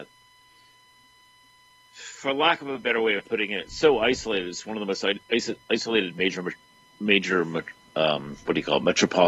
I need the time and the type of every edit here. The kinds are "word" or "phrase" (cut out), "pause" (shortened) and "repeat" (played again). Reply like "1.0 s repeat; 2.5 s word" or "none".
none